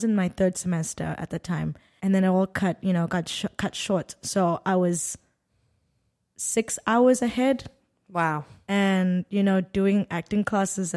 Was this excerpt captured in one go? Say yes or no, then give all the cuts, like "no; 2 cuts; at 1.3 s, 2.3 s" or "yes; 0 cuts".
no; 1 cut; at 2.0 s